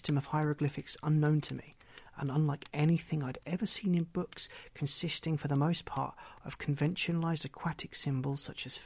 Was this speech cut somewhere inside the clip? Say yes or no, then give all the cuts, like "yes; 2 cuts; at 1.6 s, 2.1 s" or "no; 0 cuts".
no; 0 cuts